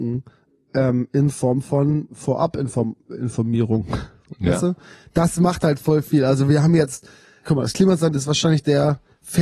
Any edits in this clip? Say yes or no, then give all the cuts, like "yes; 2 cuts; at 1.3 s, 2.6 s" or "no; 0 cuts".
no; 0 cuts